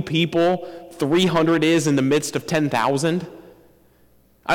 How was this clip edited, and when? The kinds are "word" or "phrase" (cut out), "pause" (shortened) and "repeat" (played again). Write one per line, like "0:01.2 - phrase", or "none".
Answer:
none